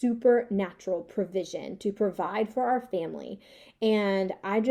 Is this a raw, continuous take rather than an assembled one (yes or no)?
yes